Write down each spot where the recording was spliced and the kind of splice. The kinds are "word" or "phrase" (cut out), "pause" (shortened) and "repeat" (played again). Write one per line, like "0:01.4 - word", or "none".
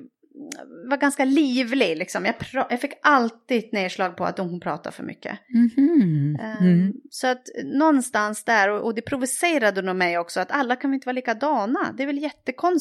none